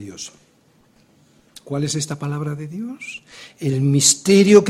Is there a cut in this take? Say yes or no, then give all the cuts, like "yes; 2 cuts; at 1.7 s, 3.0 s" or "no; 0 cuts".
no; 0 cuts